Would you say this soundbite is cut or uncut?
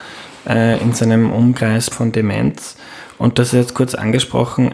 cut